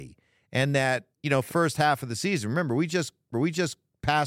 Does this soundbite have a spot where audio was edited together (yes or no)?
yes